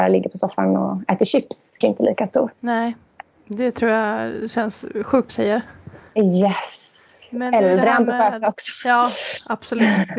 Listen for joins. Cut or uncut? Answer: cut